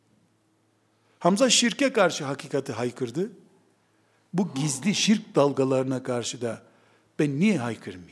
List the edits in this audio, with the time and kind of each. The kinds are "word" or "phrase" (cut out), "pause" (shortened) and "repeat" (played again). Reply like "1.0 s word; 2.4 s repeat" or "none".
none